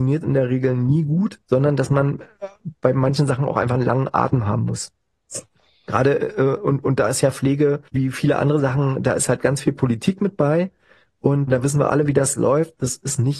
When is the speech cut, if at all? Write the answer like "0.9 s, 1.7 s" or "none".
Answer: 1.4 s, 7.9 s, 11.5 s